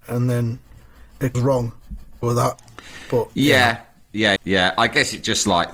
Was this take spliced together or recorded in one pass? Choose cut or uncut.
cut